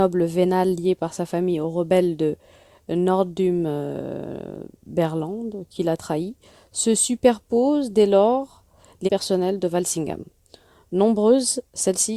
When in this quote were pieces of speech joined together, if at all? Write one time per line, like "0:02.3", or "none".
0:09.1